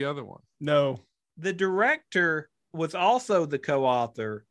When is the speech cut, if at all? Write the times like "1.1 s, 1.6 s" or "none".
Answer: none